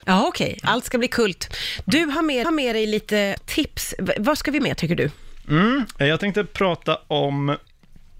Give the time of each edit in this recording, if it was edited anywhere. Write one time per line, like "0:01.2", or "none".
0:02.4
0:03.4
0:04.6